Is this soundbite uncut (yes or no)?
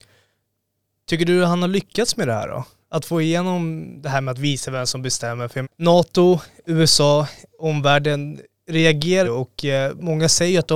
no